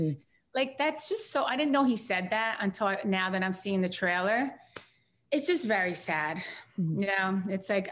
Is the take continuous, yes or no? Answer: yes